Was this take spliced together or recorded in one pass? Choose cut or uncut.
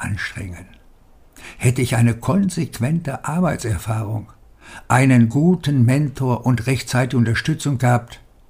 uncut